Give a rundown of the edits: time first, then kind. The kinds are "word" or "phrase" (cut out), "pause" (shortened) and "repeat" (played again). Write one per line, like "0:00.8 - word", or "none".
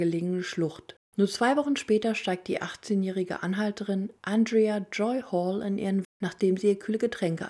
0:01.1 - pause
0:04.2 - pause
0:06.0 - word